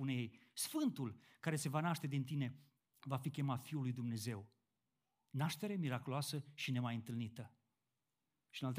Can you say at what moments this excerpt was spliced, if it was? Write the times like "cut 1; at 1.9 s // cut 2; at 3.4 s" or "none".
cut 1; at 2.8 s // cut 2; at 4.8 s